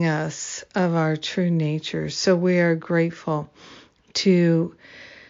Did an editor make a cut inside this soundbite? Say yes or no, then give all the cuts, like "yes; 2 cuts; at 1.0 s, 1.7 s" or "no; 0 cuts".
no; 0 cuts